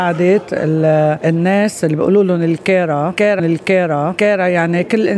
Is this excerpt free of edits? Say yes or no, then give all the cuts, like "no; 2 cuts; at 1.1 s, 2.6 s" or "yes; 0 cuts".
no; 1 cut; at 3.4 s